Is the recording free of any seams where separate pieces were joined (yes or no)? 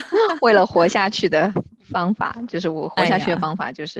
yes